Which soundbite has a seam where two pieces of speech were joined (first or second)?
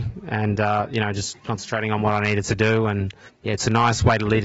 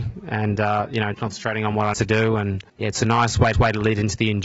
second